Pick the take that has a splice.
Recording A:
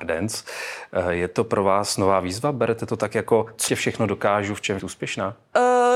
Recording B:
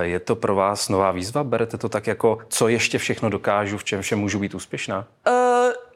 A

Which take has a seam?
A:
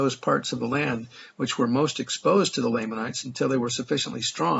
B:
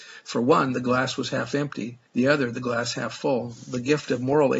B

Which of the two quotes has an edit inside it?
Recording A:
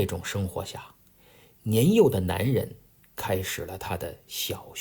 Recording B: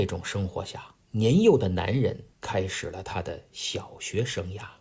B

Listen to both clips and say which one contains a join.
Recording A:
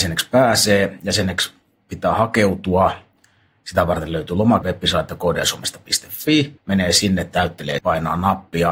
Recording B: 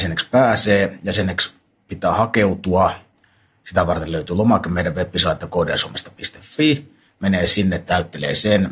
A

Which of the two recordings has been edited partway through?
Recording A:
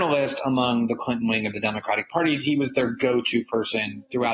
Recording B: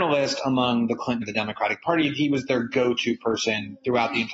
B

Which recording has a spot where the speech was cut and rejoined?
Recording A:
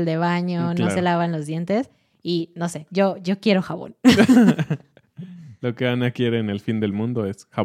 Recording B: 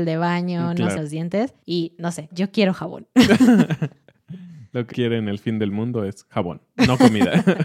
B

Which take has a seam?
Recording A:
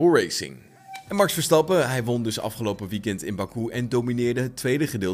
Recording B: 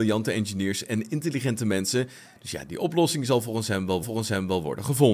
B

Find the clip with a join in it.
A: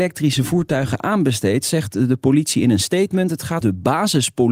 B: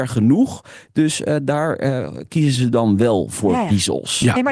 A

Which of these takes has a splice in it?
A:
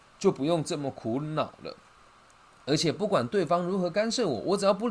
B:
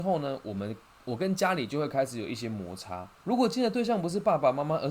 B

